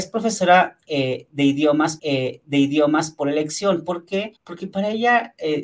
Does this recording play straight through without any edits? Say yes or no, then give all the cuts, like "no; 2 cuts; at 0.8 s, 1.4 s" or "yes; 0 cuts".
no; 2 cuts; at 2.0 s, 4.4 s